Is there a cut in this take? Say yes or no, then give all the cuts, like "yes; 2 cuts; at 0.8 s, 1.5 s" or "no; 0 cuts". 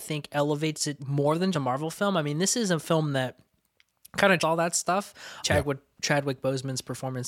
yes; 4 cuts; at 1.0 s, 1.5 s, 4.4 s, 5.4 s